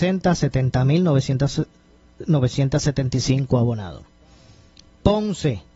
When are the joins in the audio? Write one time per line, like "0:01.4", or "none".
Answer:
none